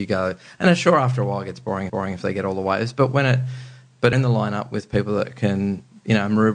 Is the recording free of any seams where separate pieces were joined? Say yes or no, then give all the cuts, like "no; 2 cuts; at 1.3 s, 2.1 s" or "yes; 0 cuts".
no; 2 cuts; at 1.9 s, 4.1 s